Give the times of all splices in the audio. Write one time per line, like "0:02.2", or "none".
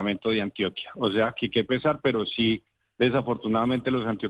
none